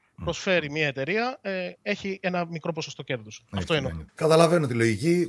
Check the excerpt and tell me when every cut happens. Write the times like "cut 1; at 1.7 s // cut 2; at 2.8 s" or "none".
cut 1; at 4.1 s